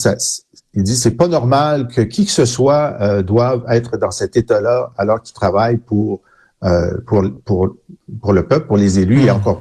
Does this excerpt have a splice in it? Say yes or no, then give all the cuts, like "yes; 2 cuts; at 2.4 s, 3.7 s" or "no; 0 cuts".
no; 0 cuts